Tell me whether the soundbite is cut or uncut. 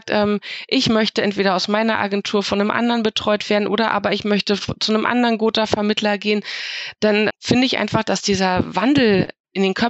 cut